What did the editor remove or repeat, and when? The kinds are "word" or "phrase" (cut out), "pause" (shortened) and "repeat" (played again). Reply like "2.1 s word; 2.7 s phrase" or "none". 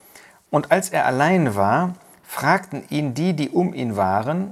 none